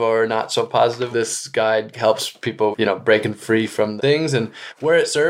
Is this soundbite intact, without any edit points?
no; 3 cuts; at 1.1 s, 2.7 s, 4.0 s

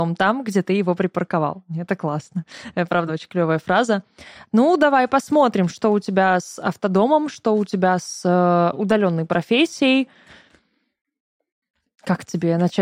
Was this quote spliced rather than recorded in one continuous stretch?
no; 0 cuts

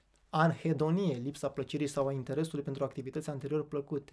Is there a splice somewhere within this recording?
no; 0 cuts

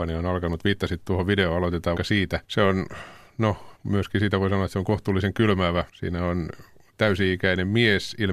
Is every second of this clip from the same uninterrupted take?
no; 4 cuts; at 2.0 s, 2.4 s, 3.8 s, 5.9 s

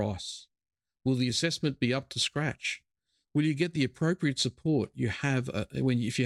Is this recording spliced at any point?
no; 0 cuts

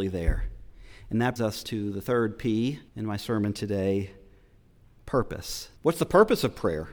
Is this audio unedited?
no; 3 cuts; at 1.4 s, 2.9 s, 5.8 s

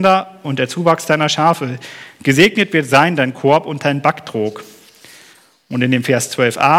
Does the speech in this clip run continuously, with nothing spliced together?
yes; 0 cuts

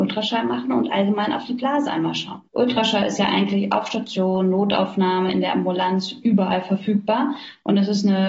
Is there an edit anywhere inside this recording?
yes; 1 cut; at 2.5 s

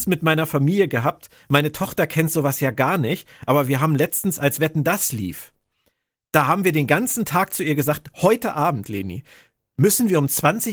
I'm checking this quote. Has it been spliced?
no; 0 cuts

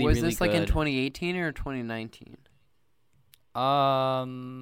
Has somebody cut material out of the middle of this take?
no; 0 cuts

